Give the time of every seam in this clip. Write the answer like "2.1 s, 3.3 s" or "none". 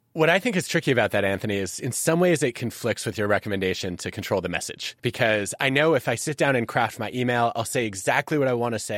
5.0 s